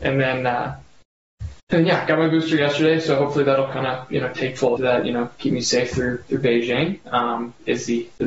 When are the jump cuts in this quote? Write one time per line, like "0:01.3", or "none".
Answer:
0:01.6
0:04.8